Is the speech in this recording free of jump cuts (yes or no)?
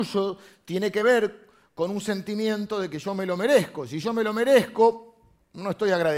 yes